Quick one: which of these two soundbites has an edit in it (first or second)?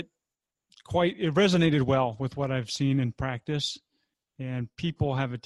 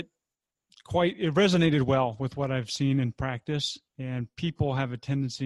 second